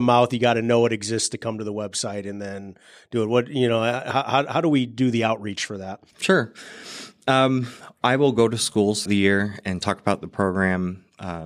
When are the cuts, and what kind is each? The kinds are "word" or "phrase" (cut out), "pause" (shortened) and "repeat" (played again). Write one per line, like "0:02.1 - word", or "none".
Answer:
0:06.1 - pause
0:09.1 - word